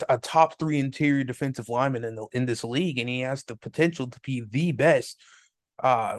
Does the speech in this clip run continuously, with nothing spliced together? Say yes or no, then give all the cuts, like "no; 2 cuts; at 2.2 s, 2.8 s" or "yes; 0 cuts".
yes; 0 cuts